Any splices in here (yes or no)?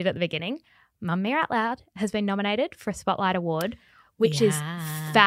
no